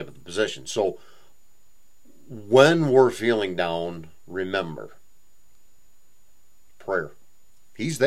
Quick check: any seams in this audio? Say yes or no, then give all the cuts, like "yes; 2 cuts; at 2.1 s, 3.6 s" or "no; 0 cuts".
no; 0 cuts